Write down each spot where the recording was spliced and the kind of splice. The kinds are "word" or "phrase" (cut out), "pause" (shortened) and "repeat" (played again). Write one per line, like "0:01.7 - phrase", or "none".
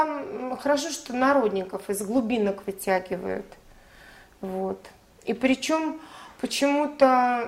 none